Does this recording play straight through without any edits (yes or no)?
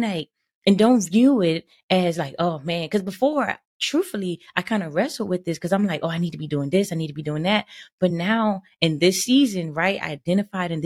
yes